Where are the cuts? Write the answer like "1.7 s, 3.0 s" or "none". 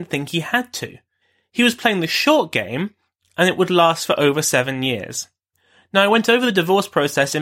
none